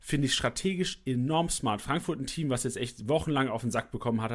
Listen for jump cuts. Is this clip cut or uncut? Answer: uncut